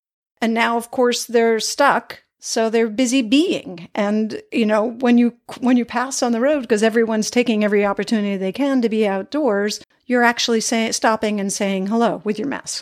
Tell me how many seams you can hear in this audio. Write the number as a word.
one